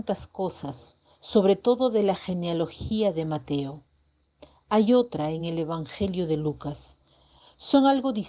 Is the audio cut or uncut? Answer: uncut